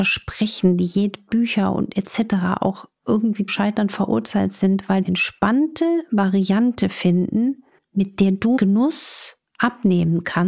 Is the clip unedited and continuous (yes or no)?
no